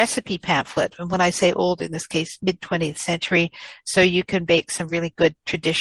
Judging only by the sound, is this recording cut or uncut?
uncut